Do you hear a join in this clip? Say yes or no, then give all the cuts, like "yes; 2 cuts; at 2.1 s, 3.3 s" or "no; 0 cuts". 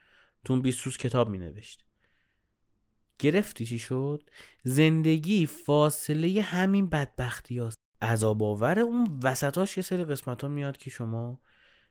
no; 0 cuts